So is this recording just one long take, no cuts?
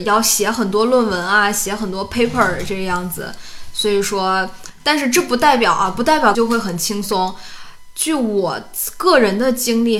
no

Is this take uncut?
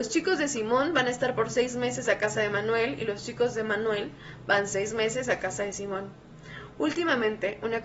yes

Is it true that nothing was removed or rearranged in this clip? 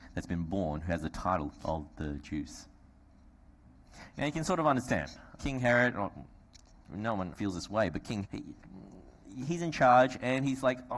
no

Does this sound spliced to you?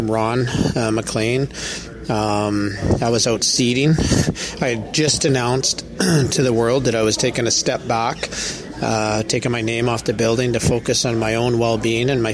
no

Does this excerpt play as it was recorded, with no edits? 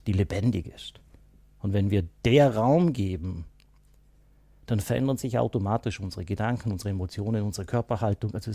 yes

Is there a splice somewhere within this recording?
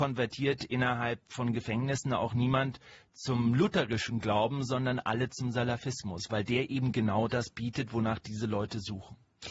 no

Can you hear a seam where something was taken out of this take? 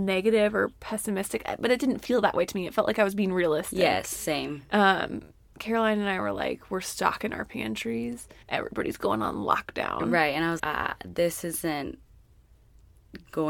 yes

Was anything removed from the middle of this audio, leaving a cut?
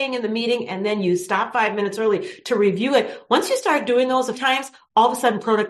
yes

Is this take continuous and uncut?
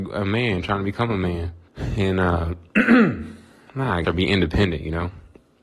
no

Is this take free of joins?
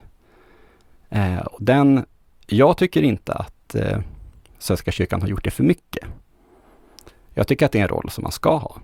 yes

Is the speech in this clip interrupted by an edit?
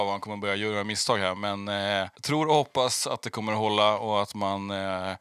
yes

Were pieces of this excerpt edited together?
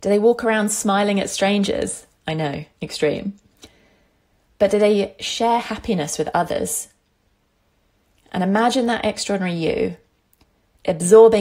no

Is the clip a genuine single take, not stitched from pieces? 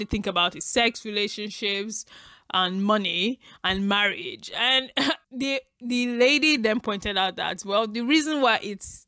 yes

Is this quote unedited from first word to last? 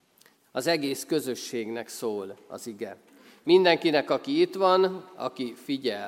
yes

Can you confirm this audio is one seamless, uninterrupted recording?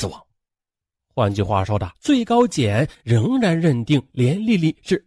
no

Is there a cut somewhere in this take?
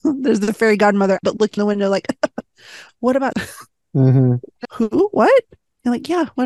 yes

